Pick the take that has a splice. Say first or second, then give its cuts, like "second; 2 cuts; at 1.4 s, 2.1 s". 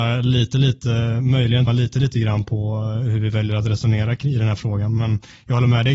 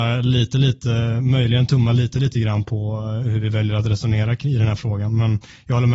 first; 1 cut; at 1.7 s